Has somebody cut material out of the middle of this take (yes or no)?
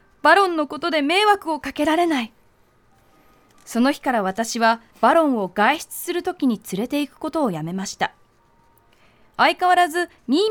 yes